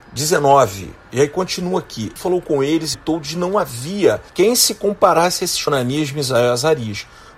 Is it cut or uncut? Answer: cut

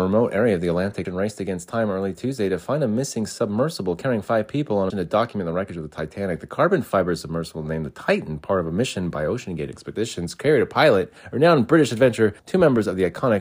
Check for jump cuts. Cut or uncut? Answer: cut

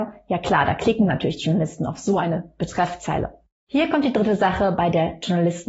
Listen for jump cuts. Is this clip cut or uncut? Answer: cut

